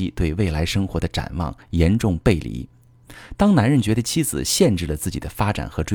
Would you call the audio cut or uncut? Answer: uncut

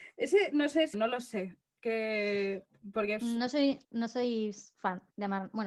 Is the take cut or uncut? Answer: cut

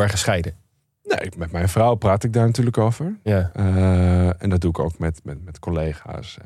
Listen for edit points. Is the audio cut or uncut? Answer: uncut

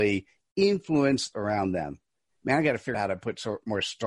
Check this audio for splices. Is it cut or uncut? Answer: cut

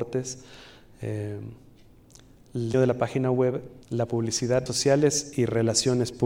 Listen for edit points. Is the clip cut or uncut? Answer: cut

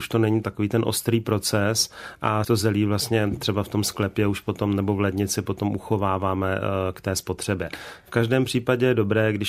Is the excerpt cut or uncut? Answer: cut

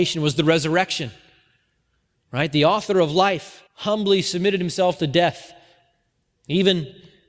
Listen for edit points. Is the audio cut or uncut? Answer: cut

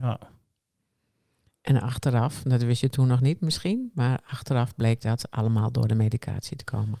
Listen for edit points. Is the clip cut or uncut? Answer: uncut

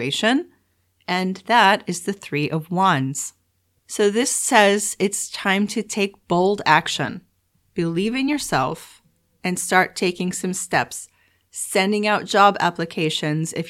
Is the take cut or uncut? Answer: uncut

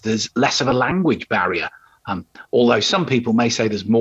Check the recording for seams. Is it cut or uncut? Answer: uncut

